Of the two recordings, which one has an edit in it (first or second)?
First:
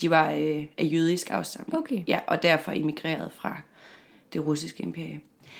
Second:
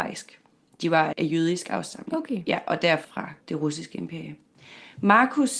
second